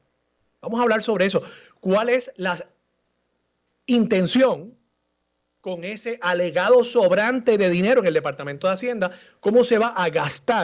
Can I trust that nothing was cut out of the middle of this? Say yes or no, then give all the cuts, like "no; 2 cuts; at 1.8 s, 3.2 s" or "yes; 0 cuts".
yes; 0 cuts